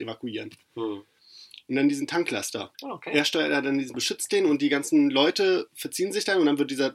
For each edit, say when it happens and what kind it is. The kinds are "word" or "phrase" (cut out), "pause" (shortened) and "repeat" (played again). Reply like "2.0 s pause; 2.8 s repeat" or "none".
2.7 s pause; 3.9 s word